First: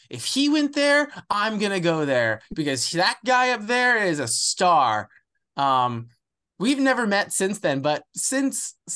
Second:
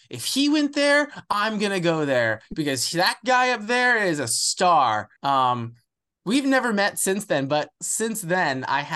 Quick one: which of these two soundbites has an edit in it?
second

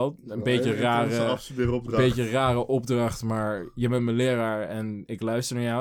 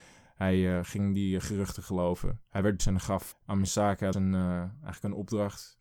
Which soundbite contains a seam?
second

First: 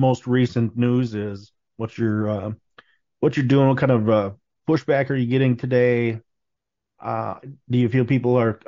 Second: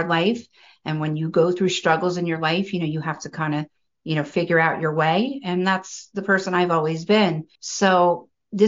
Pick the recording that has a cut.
second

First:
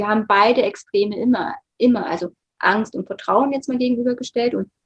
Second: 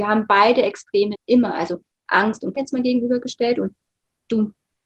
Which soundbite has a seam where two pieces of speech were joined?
second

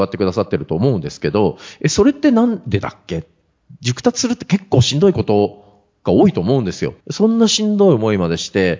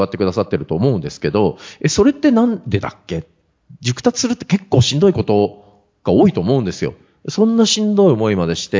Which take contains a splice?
first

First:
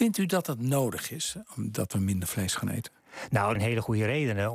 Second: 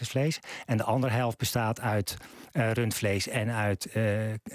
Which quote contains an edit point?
first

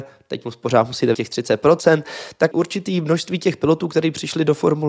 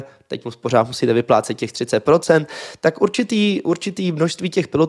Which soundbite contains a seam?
first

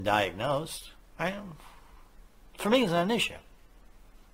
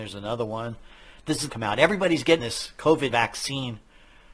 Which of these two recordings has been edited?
second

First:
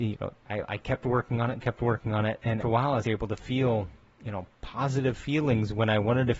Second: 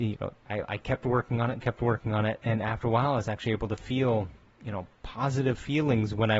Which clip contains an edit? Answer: first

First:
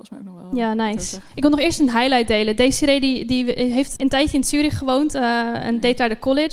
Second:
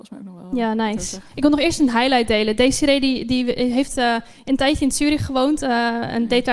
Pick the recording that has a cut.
first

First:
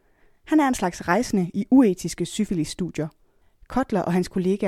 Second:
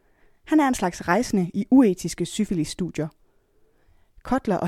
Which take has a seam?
first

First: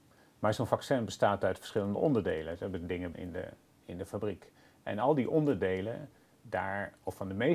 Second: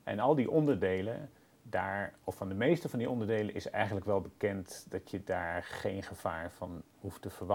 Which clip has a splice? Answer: first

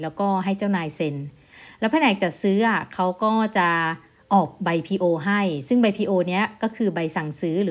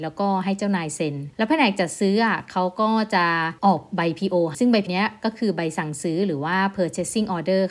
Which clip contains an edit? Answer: second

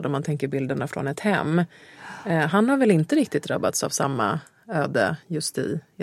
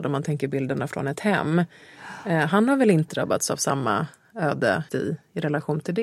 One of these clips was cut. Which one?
second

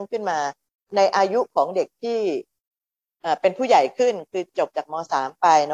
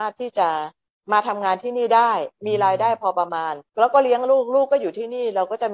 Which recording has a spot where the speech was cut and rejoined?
second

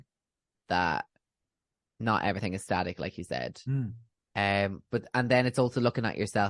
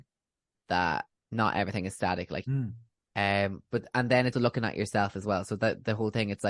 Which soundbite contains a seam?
second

